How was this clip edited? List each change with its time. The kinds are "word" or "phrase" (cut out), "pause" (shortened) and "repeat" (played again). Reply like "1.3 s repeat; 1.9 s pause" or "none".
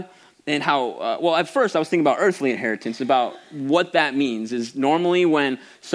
none